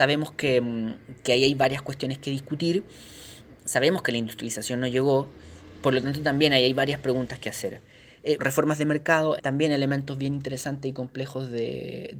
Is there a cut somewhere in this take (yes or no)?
yes